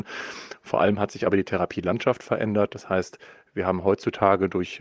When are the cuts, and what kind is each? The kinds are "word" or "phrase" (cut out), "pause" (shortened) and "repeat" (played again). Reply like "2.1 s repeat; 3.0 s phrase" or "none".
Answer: none